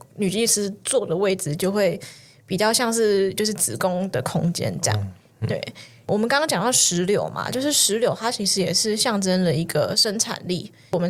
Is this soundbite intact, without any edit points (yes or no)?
yes